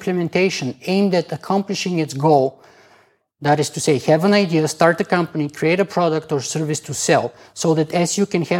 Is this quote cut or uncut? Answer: uncut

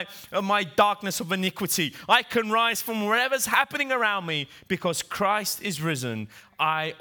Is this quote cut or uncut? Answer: uncut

